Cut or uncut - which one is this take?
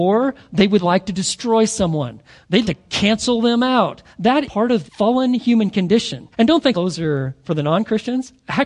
cut